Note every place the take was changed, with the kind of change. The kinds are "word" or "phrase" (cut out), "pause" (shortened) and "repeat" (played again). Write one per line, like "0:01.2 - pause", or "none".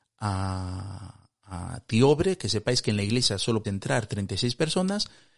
0:03.6 - word